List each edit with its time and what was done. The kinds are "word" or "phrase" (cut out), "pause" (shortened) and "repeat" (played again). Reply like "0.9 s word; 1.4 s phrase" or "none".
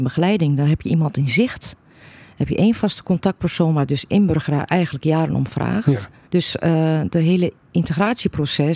6.3 s pause